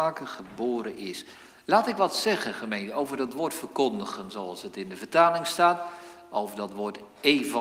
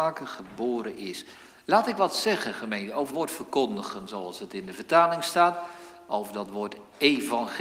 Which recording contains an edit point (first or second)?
second